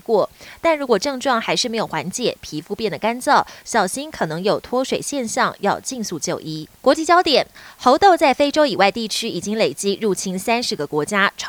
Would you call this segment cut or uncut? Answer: cut